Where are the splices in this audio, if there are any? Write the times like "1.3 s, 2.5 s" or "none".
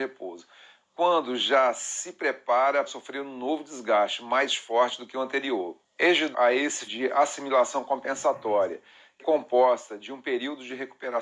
2.9 s, 6.3 s, 6.9 s, 9.2 s